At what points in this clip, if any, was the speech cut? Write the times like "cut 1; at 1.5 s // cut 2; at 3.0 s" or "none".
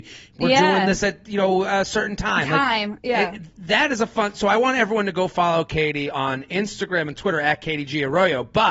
none